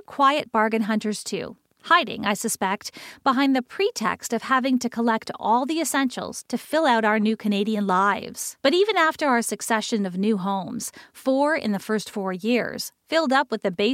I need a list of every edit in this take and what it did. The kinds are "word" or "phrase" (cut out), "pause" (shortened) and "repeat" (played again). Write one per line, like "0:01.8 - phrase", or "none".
0:08.6 - pause